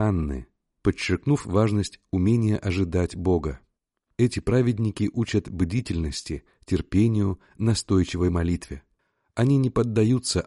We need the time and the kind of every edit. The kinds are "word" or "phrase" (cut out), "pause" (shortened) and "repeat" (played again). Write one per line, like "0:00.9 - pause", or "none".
none